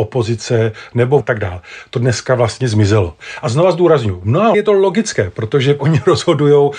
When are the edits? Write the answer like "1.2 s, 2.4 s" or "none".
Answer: 1.2 s, 4.5 s